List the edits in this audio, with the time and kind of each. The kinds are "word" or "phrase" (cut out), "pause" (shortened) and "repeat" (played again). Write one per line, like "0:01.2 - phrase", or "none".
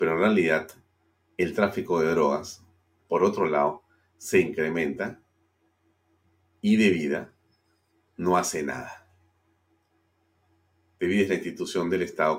none

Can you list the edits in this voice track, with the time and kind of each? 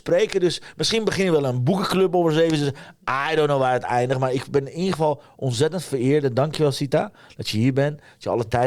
none

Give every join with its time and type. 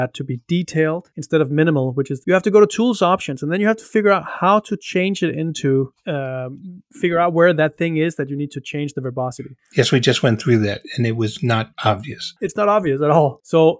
0:02.2 - word

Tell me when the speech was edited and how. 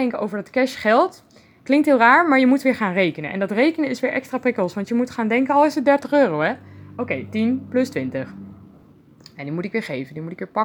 none

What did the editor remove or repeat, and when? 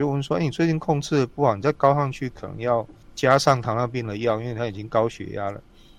0:03.0 - pause

